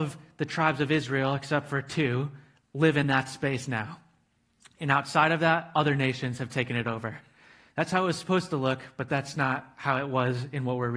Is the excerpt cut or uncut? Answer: uncut